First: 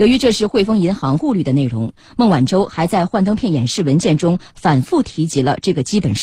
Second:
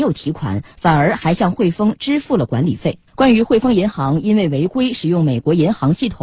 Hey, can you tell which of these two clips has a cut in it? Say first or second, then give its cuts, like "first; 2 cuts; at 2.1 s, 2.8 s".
second; 1 cut; at 3.1 s